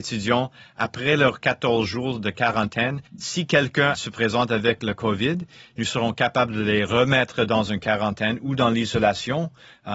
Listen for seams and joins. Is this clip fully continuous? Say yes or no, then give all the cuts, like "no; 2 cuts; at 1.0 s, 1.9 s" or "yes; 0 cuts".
no; 1 cut; at 3.1 s